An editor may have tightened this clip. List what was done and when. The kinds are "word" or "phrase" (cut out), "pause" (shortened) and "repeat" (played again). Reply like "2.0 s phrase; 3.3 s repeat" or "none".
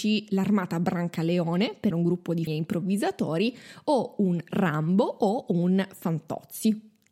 1.9 s word; 2.5 s word